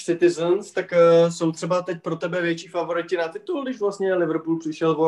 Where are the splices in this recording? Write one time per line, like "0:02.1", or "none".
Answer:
none

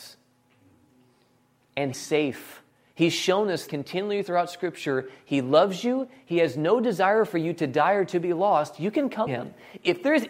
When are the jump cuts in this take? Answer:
0:01.9
0:02.7
0:03.7
0:09.3

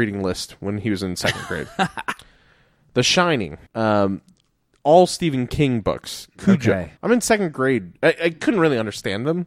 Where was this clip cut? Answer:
0:03.7
0:07.0
0:08.0

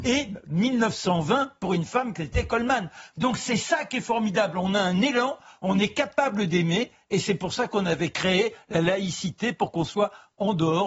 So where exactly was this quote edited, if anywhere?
none

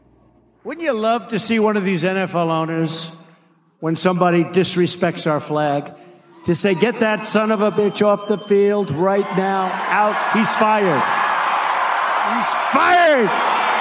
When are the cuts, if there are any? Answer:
none

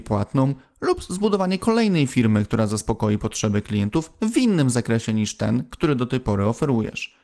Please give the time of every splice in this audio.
none

